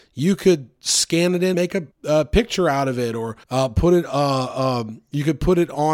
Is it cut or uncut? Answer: cut